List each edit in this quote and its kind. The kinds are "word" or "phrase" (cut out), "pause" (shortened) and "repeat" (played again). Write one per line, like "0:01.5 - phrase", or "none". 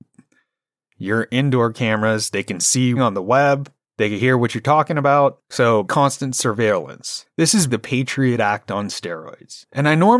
0:03.0 - phrase
0:05.8 - word
0:07.7 - word